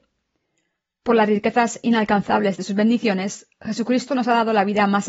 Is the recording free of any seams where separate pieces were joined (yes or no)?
yes